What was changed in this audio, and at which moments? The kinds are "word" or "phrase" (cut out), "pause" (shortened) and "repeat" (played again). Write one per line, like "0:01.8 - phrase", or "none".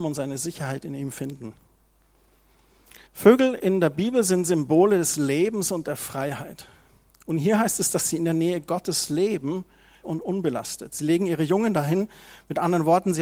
0:03.1 - pause
0:10.0 - word

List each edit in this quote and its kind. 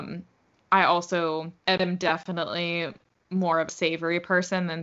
0:01.6 - pause

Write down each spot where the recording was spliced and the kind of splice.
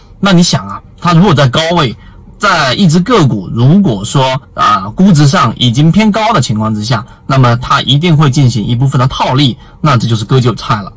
0:04.4 - pause

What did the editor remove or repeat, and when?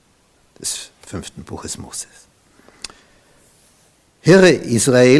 none

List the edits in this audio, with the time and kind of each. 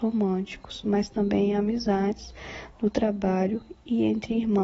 none

